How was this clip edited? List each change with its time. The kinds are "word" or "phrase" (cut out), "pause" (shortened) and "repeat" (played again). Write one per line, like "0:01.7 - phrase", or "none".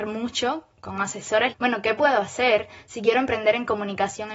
0:01.5 - phrase

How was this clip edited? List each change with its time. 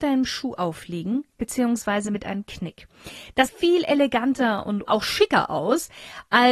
0:02.5 - word
0:03.5 - word
0:04.9 - word

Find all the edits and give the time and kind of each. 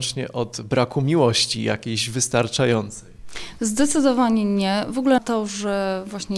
0:05.2 - word

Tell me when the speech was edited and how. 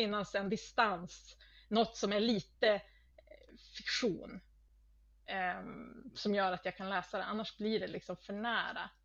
none

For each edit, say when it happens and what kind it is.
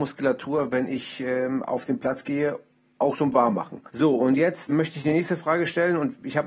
0:03.1 - word
0:03.9 - pause
0:04.7 - word

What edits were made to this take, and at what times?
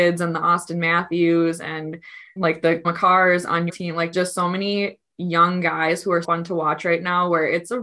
0:02.4 - word
0:02.8 - word
0:03.7 - word
0:04.1 - word
0:06.2 - word

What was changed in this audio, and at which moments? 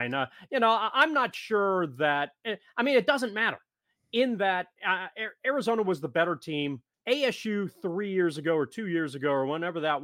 0:06.9 - pause

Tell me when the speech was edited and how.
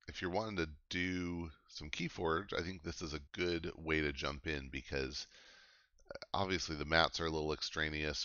0:03.3 - pause

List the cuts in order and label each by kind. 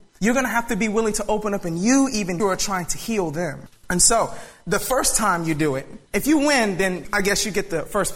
0:02.4 - phrase

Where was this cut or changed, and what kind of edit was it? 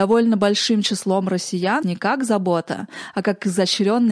0:01.8 - word

